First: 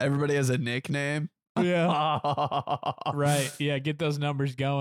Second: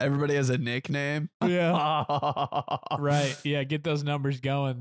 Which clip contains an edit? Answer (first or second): second